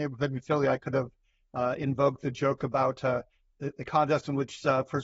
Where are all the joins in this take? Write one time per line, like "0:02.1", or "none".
none